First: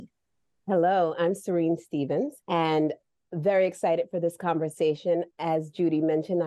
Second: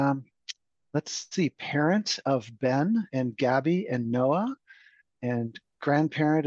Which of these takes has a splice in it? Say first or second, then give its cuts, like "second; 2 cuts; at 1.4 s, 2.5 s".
first; 2 cuts; at 2.4 s, 5.3 s